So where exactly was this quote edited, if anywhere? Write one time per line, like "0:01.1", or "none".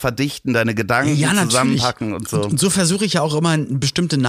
none